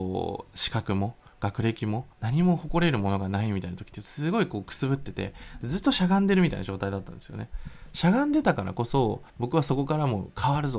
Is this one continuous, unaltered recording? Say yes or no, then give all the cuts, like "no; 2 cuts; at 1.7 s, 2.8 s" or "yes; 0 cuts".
no; 2 cuts; at 2.1 s, 9.3 s